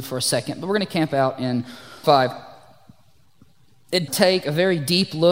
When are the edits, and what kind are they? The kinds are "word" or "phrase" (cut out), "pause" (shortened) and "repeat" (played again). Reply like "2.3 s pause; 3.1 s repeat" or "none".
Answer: 2.0 s word; 4.1 s word